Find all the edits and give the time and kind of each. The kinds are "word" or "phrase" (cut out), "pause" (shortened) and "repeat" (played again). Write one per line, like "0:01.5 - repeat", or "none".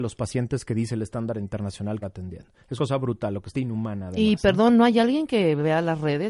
0:02.0 - phrase
0:02.8 - word
0:03.5 - phrase